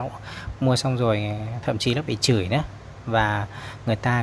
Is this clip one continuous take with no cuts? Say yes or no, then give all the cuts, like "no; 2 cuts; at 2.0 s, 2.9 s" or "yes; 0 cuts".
yes; 0 cuts